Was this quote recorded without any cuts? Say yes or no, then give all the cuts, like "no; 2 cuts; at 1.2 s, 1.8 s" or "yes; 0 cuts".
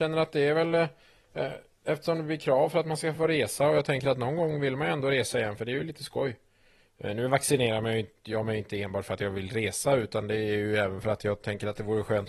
yes; 0 cuts